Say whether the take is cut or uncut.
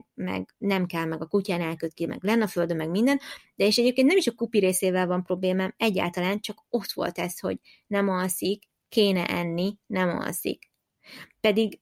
uncut